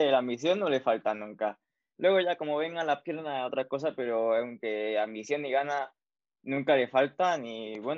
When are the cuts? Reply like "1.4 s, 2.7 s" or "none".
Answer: 4.6 s

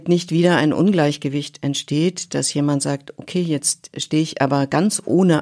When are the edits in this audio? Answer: none

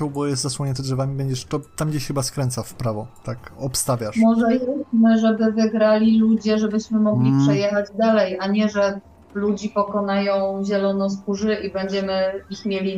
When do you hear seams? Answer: none

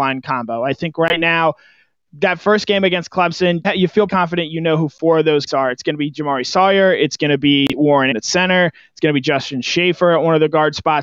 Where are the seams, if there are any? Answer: 3.6 s, 4.1 s, 5.5 s, 8.1 s

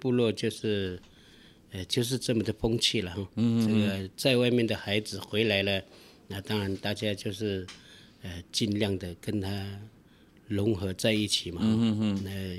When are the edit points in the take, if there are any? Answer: none

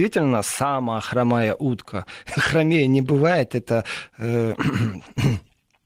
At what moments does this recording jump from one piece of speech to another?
none

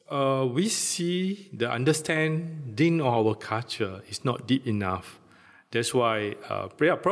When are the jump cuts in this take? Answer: none

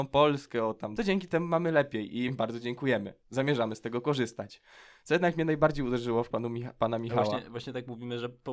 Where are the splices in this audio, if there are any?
1.0 s, 2.3 s, 6.3 s

